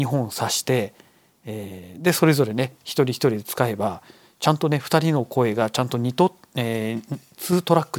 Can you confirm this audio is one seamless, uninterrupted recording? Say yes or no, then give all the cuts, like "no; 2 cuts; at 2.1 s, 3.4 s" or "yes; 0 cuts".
yes; 0 cuts